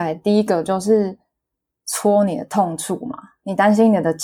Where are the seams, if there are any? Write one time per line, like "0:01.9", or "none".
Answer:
none